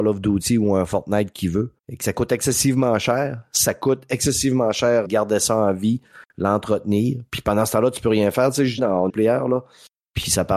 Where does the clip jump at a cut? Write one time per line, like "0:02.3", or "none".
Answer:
0:01.8
0:05.0
0:08.8
0:09.1